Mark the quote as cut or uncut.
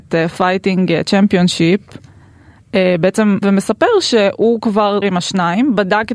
cut